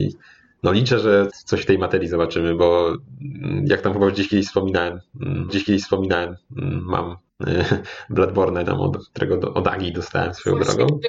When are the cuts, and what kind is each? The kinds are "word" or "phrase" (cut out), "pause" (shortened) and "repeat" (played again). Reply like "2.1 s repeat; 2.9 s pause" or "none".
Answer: 1.3 s word; 5.5 s repeat; 8.6 s word